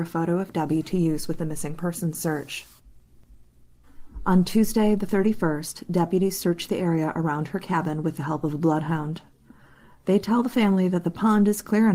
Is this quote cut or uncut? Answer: uncut